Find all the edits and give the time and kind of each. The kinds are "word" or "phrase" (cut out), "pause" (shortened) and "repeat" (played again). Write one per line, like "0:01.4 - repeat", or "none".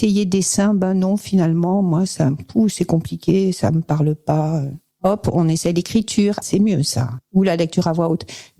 0:06.4 - word